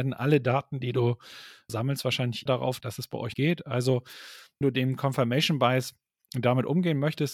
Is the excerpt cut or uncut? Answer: cut